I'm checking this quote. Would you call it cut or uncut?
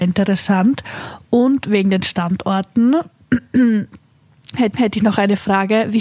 cut